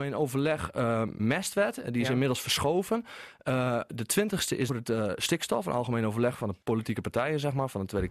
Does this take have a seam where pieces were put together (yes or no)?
yes